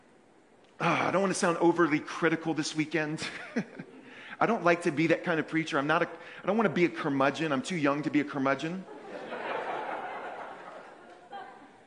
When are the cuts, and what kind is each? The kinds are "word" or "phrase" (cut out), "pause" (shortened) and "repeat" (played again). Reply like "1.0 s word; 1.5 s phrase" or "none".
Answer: none